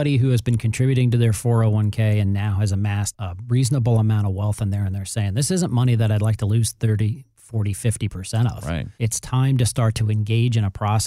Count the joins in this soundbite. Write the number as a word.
one